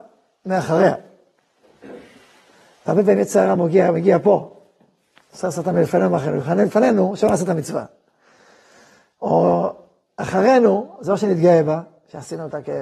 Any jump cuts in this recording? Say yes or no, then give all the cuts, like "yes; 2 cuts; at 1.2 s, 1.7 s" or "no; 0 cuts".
no; 0 cuts